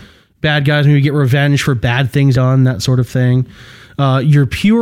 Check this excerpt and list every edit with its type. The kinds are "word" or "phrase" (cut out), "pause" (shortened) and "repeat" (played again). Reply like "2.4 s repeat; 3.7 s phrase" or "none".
2.3 s phrase